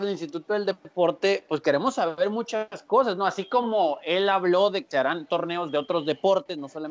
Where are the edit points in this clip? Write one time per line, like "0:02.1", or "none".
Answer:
0:04.9